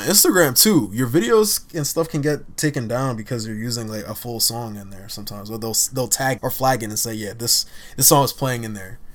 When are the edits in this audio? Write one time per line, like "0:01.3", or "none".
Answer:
0:06.4